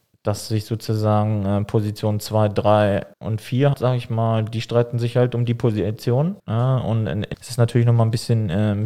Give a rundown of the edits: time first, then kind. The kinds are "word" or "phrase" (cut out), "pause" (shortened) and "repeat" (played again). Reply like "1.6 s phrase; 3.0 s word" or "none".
3.1 s pause; 3.7 s word; 6.4 s pause; 7.3 s phrase